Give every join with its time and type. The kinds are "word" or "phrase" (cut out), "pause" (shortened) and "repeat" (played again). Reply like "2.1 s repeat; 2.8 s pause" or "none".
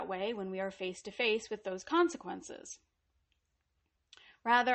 none